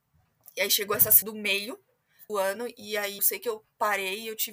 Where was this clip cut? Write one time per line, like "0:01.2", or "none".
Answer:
0:01.2
0:02.3
0:03.2